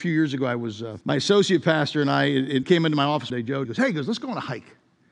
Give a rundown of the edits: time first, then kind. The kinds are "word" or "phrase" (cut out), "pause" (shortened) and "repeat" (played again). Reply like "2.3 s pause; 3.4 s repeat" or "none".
1.0 s pause; 2.6 s word; 3.3 s word; 3.6 s word